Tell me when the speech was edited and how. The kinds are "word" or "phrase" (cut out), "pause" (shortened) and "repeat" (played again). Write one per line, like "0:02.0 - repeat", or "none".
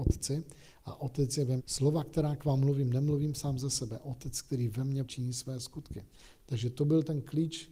0:01.6 - word
0:05.0 - word